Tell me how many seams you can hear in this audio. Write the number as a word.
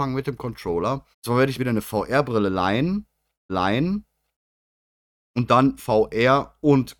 four